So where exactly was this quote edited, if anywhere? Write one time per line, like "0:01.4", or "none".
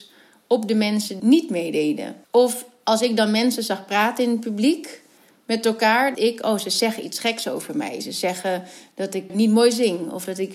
0:01.2
0:02.2
0:06.1
0:09.3